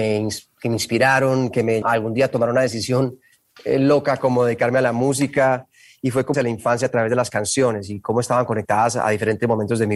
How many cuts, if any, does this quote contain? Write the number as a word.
two